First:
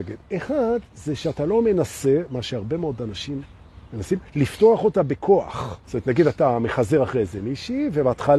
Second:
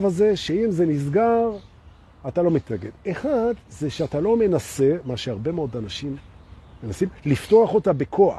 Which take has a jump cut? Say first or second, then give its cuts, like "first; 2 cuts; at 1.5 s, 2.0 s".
first; 2 cuts; at 3.8 s, 5.8 s